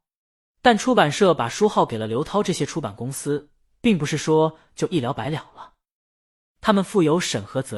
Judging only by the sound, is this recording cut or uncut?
uncut